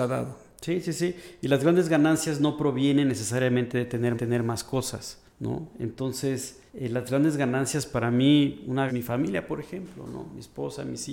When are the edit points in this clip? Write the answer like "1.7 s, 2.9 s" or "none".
4.1 s, 5.3 s, 6.7 s, 8.9 s